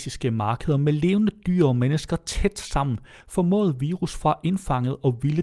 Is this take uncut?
yes; 0 cuts

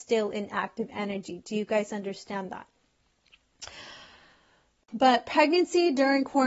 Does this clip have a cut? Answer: no; 0 cuts

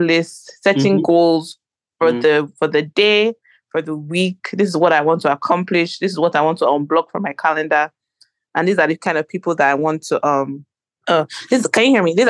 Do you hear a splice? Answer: no; 0 cuts

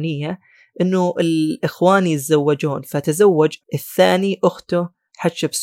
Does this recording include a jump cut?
yes; 1 cut; at 3.6 s

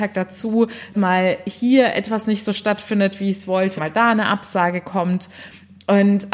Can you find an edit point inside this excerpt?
yes; 2 cuts; at 0.9 s, 3.8 s

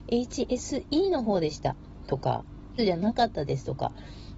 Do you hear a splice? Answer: yes; 1 cut; at 2.8 s

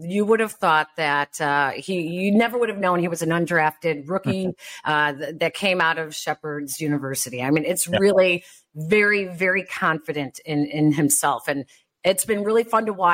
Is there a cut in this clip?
no; 0 cuts

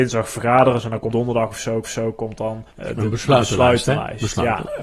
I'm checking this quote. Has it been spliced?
yes; 3 cuts; at 1.1 s, 1.8 s, 2.7 s

